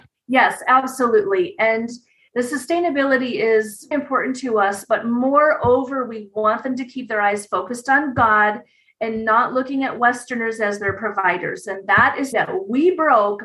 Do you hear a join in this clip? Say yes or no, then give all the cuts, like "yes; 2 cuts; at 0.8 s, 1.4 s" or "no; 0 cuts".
yes; 2 cuts; at 3.9 s, 12.3 s